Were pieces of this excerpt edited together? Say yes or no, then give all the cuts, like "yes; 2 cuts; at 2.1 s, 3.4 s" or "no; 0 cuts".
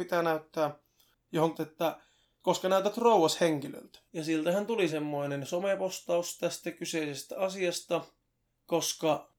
yes; 3 cuts; at 1.5 s, 4.1 s, 4.9 s